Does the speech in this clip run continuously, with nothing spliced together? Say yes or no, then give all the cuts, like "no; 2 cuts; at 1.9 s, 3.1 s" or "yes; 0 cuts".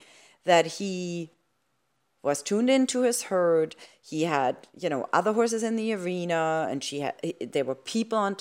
yes; 0 cuts